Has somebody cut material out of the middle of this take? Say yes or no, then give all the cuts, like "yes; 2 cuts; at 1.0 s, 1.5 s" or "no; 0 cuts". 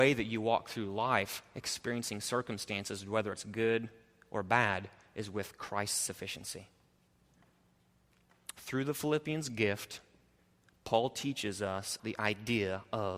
yes; 1 cut; at 12.0 s